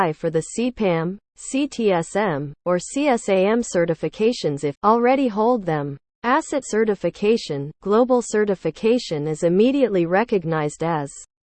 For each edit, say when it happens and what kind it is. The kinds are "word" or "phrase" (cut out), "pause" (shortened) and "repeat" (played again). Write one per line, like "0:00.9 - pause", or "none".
0:04.8 - word
0:06.6 - word